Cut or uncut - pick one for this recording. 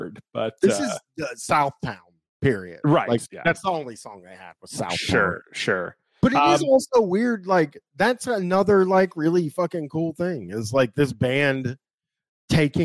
uncut